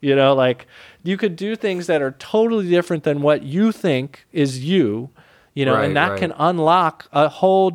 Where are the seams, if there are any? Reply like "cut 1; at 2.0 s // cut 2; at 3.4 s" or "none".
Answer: none